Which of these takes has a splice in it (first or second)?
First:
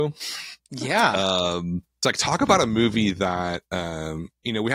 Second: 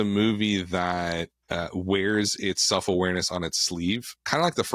first